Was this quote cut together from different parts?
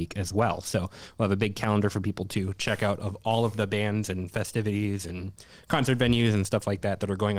no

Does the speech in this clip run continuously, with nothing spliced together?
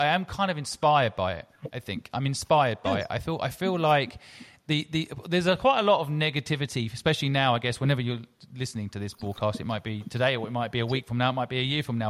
yes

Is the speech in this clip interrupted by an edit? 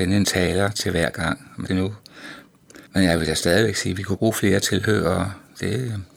yes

